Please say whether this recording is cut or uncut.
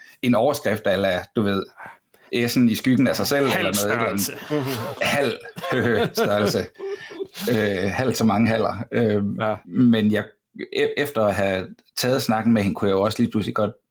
uncut